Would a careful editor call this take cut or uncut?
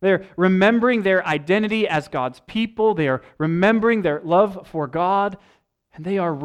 uncut